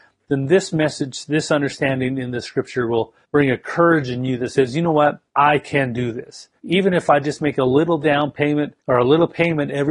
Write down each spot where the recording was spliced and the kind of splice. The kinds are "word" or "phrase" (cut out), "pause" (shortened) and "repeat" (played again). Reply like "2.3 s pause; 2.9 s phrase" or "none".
3.2 s pause; 5.3 s pause; 6.6 s pause; 8.8 s pause